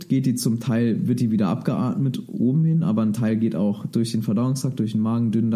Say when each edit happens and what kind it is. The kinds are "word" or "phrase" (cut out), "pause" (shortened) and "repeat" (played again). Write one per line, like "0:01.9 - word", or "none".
none

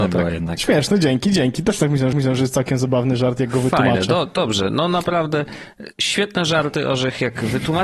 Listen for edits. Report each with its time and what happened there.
0:02.1 - repeat

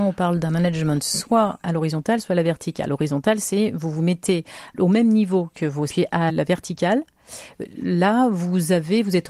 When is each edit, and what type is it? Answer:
0:05.9 - phrase

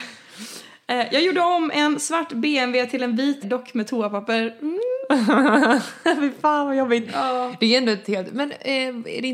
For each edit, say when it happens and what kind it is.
0:03.4 - word
0:08.0 - word

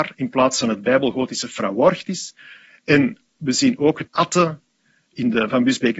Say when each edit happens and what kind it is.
0:04.1 - word

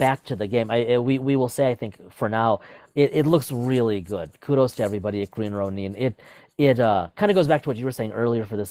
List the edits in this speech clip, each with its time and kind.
none

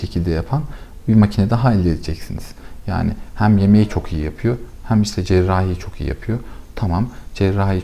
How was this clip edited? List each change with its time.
none

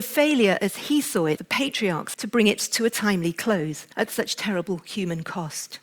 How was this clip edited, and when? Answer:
0:01.4 - word
0:02.1 - phrase
0:03.9 - pause

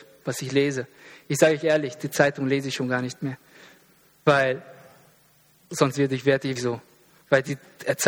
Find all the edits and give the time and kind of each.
0:06.6 - word

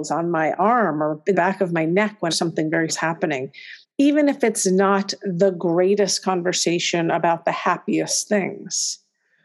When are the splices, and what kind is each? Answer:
0:01.3 - word
0:02.3 - phrase
0:02.9 - word
0:03.8 - pause

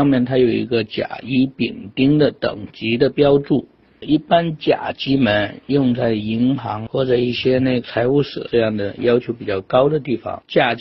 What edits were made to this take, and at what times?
none

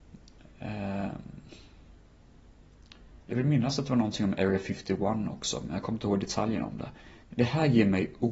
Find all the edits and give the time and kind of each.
0:03.2 - pause
0:07.2 - pause

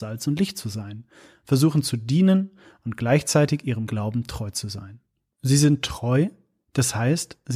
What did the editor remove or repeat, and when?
0:03.9 - word

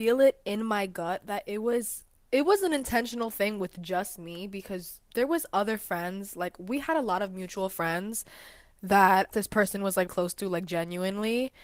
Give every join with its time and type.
0:09.3 - phrase
0:10.1 - word

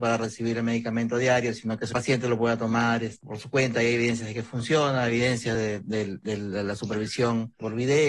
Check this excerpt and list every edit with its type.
none

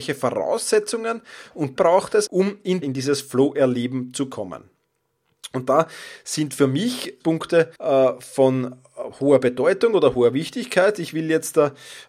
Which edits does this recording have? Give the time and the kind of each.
0:01.8 - word
0:02.3 - word
0:02.8 - phrase
0:07.2 - word
0:07.8 - pause

